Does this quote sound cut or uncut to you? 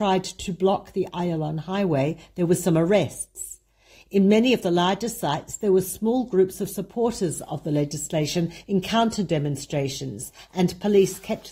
uncut